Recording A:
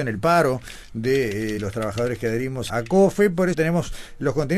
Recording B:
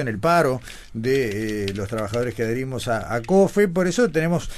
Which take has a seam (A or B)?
A